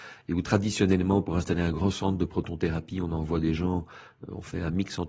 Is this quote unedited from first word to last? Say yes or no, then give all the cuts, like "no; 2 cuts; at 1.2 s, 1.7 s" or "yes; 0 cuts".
yes; 0 cuts